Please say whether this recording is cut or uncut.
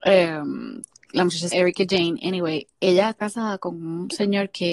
cut